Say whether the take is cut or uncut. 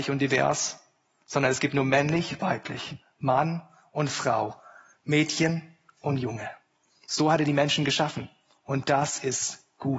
uncut